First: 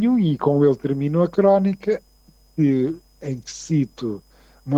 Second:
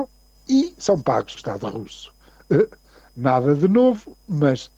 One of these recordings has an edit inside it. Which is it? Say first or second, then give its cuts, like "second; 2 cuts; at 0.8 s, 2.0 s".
second; 1 cut; at 1.4 s